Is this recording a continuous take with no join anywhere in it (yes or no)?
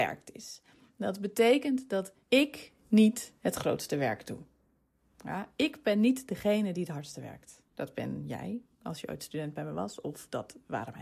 no